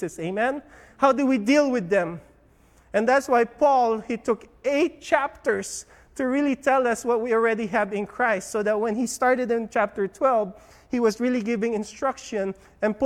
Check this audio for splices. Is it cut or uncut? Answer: uncut